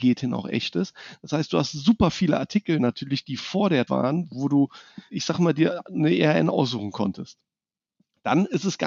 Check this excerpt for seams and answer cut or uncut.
cut